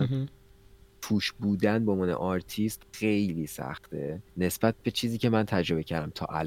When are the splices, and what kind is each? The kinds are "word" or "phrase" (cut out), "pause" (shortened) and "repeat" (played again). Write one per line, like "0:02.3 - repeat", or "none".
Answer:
0:02.9 - pause
0:04.3 - pause